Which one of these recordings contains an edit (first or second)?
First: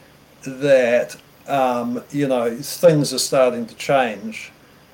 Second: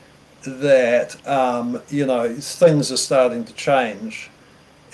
second